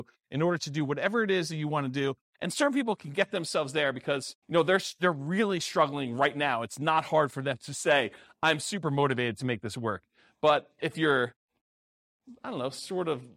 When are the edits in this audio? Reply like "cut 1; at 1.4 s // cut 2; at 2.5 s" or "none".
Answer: cut 1; at 4.4 s